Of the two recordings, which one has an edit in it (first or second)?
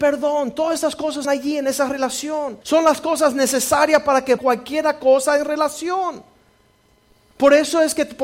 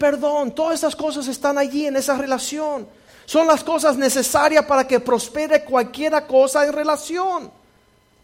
first